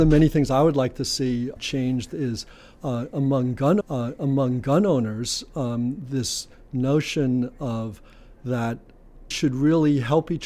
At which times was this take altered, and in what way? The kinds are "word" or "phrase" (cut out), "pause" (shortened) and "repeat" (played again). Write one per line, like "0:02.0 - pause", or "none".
0:01.6 - word
0:03.8 - repeat
0:09.3 - word